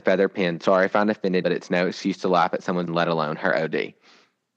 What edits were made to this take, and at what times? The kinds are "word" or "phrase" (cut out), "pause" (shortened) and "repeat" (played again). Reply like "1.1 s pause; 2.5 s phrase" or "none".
1.4 s word; 2.9 s word